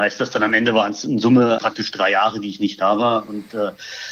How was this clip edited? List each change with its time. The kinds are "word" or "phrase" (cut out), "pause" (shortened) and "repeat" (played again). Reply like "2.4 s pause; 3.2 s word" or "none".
1.6 s word